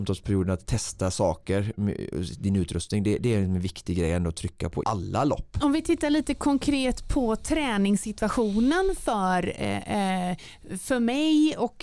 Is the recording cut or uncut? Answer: cut